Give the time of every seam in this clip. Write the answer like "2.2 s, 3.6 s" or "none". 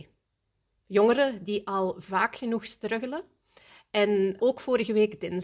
4.4 s